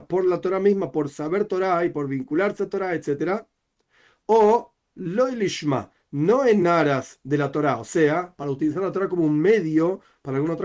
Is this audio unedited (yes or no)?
yes